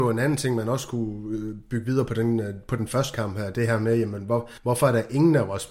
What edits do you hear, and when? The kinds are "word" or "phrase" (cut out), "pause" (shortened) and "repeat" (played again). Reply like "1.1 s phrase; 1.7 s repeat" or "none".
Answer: 4.6 s pause